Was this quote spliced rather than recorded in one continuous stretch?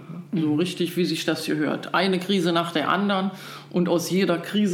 no; 0 cuts

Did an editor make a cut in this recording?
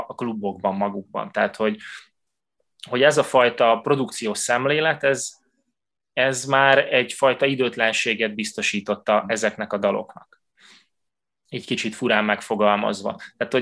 no; 0 cuts

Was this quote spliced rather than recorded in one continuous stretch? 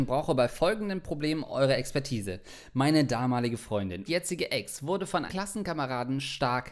yes; 2 cuts; at 4.1 s, 5.3 s

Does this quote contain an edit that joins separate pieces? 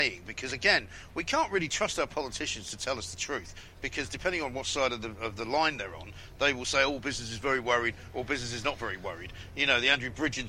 no; 0 cuts

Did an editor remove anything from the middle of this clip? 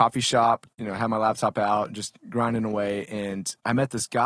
no; 0 cuts

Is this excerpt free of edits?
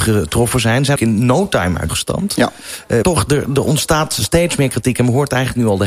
no; 3 cuts; at 1.0 s, 1.9 s, 3.0 s

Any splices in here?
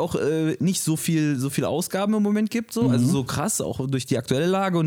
no; 0 cuts

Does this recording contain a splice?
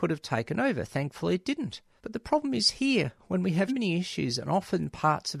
yes; 2 cuts; at 2.0 s, 3.7 s

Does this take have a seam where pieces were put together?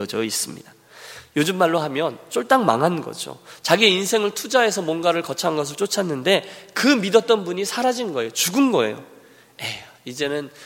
no; 0 cuts

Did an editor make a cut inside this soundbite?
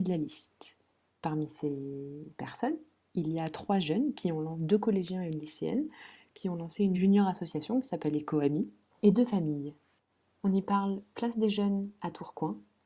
no; 0 cuts

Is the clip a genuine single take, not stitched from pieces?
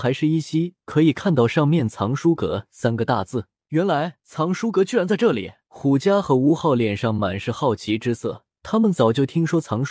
no; 4 cuts; at 3.6 s, 4.2 s, 5.6 s, 8.5 s

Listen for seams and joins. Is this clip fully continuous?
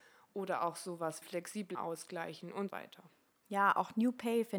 no; 3 cuts; at 1.2 s, 1.7 s, 2.7 s

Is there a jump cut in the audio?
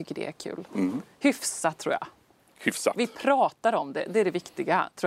no; 0 cuts

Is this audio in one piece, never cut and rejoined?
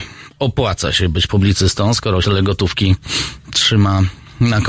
no; 2 cuts; at 1.3 s, 2.2 s

